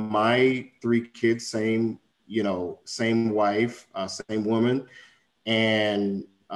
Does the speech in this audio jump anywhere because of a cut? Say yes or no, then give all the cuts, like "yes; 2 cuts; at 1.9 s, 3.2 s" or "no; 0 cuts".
no; 0 cuts